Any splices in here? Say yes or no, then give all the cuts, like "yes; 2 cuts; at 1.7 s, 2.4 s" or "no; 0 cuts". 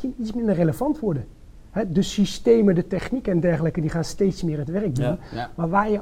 no; 0 cuts